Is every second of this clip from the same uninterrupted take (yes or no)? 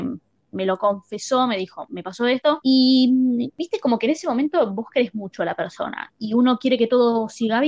yes